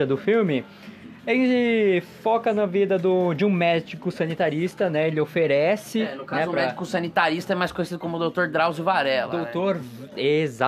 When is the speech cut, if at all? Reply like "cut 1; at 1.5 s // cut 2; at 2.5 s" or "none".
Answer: none